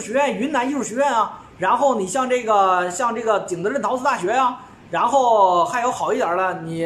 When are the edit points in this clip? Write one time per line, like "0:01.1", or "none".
none